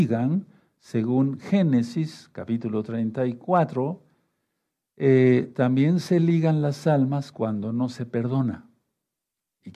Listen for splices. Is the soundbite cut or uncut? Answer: uncut